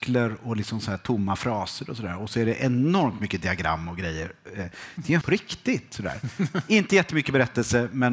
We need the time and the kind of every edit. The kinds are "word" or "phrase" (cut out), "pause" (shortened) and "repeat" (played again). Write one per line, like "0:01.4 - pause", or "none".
0:05.2 - word